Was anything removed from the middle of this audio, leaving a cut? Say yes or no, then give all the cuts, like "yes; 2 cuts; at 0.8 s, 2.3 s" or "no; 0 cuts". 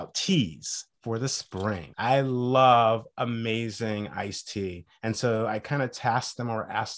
no; 0 cuts